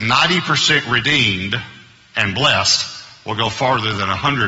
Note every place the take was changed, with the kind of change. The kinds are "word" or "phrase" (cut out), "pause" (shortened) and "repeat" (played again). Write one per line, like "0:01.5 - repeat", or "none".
none